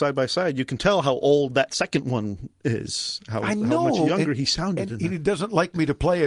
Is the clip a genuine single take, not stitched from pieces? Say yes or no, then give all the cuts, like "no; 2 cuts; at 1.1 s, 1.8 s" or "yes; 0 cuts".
yes; 0 cuts